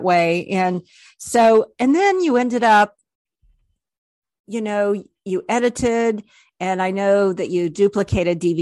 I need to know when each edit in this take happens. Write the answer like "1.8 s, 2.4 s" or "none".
none